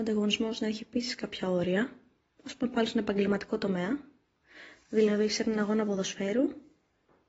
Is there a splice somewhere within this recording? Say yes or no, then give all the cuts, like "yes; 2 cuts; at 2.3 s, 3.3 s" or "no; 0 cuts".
yes; 1 cut; at 2.2 s